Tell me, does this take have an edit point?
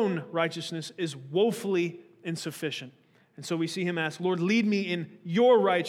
no; 0 cuts

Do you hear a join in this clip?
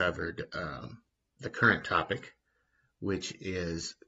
no; 0 cuts

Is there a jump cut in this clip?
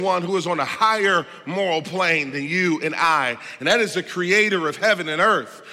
no; 0 cuts

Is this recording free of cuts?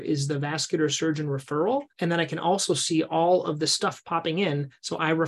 no; 1 cut; at 1.9 s

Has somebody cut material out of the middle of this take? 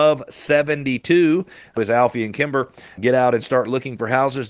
yes; 2 cuts; at 1.8 s, 3.0 s

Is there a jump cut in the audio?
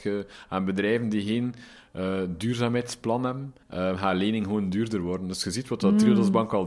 yes; 1 cut; at 3.6 s

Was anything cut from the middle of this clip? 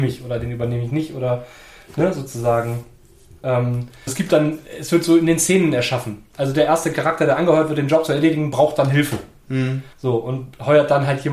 yes; 2 cuts; at 4.1 s, 9.9 s

